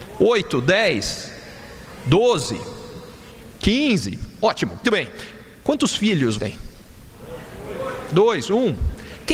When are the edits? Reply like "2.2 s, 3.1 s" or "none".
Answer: 4.8 s, 5.5 s, 6.4 s